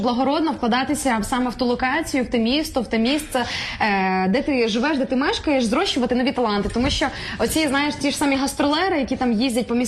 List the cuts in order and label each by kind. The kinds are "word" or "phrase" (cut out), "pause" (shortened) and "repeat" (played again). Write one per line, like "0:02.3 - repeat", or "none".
none